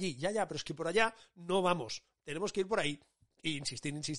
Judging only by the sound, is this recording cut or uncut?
uncut